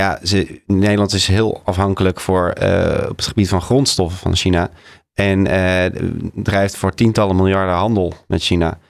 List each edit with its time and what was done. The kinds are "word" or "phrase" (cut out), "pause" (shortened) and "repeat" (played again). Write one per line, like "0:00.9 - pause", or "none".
none

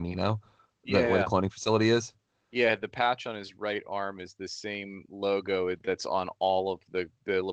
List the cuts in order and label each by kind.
none

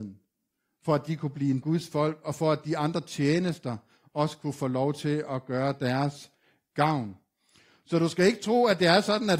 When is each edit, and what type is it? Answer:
0:01.6 - phrase

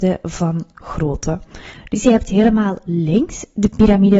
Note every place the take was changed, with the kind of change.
none

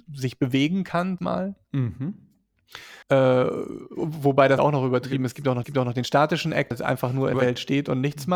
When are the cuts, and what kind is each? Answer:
0:01.2 - word
0:03.0 - pause
0:04.6 - word
0:05.6 - repeat
0:06.7 - word
0:07.3 - word

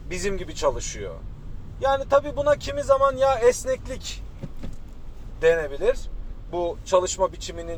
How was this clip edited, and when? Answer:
none

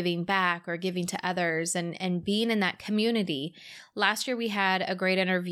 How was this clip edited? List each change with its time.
none

